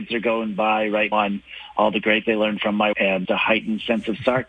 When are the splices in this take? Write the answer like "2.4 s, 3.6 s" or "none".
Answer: 1.1 s, 2.2 s, 2.9 s, 3.2 s